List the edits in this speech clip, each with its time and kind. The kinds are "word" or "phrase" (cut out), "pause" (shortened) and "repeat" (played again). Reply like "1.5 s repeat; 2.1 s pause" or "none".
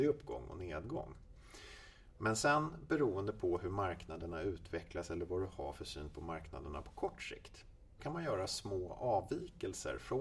8.0 s word